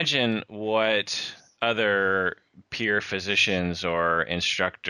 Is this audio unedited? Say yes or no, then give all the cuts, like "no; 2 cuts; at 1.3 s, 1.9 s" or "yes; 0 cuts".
yes; 0 cuts